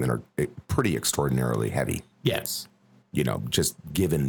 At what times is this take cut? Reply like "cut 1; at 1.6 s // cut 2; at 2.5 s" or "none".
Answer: cut 1; at 2.1 s

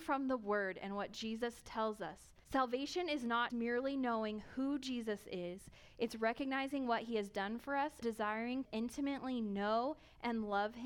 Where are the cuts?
cut 1; at 2.4 s // cut 2; at 3.5 s // cut 3; at 8.0 s // cut 4; at 8.6 s

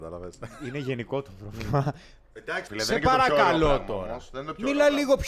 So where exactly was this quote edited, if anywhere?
cut 1; at 2.7 s

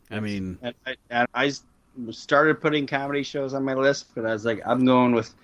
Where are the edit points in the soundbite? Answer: cut 1; at 1.2 s

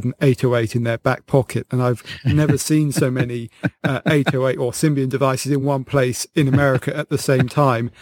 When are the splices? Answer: none

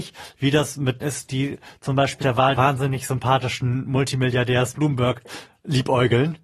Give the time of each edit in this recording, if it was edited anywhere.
cut 1; at 1.0 s // cut 2; at 2.2 s // cut 3; at 2.5 s // cut 4; at 4.7 s

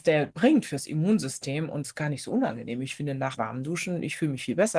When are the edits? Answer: cut 1; at 1.8 s // cut 2; at 3.4 s

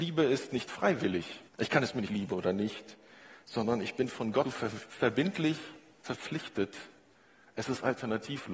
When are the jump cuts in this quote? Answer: cut 1; at 1.5 s // cut 2; at 2.1 s // cut 3; at 4.4 s

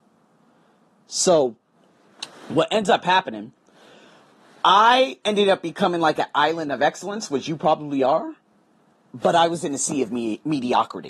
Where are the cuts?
none

